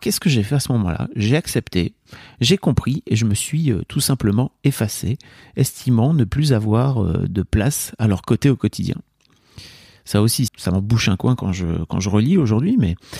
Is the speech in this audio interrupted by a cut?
yes; 1 cut; at 10.5 s

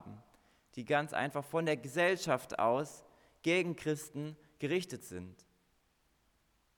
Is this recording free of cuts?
yes; 0 cuts

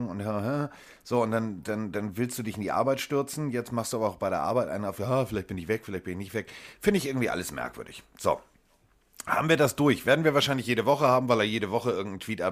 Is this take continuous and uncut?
yes; 0 cuts

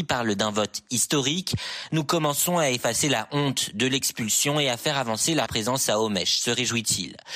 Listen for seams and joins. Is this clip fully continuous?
no; 1 cut; at 5.5 s

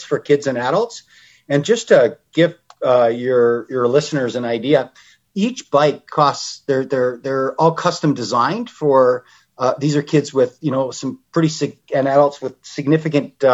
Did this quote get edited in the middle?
no; 0 cuts

